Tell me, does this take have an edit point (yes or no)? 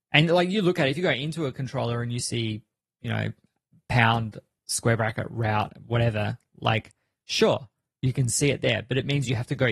no